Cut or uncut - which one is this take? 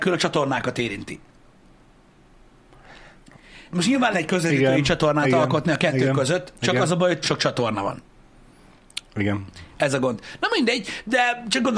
cut